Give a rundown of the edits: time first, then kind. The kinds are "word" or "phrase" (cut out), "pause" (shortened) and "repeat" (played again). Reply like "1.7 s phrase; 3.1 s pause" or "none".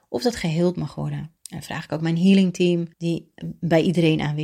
1.4 s pause; 2.9 s pause